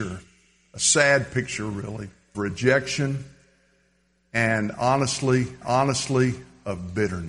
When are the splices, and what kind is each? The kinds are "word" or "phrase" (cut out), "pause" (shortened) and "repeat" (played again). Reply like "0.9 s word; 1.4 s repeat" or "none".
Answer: 2.3 s word; 5.6 s repeat